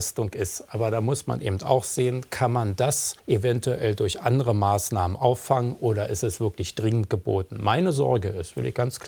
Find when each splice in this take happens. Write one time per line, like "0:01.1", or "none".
0:03.2